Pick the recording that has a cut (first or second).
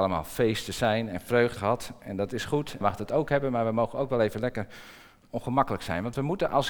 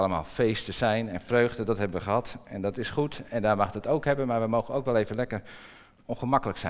first